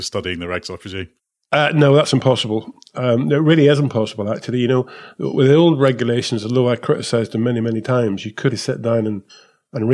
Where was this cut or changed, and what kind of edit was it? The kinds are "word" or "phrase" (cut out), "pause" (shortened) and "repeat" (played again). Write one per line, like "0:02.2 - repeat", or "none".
0:08.5 - word